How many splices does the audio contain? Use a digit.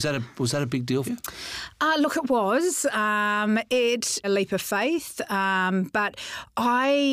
2